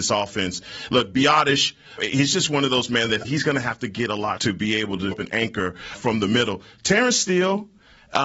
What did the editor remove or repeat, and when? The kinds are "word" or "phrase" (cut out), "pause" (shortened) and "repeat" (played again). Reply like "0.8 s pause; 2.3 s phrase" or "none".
2.0 s word; 2.9 s word; 3.2 s word; 4.4 s word; 5.1 s word; 6.0 s word